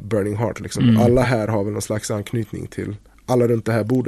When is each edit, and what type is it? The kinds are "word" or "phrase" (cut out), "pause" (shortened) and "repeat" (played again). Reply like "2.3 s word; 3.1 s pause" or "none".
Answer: none